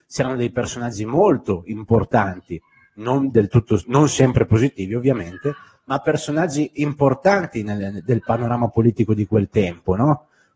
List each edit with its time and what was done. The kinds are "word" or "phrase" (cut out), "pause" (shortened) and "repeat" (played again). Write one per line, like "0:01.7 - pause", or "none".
none